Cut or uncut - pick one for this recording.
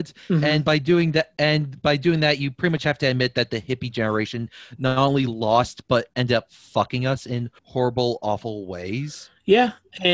cut